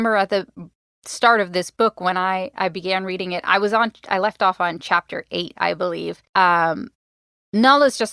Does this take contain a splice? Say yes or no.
yes